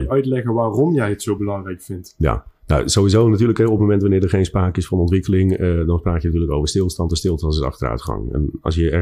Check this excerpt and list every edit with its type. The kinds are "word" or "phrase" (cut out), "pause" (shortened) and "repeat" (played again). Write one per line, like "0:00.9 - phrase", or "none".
none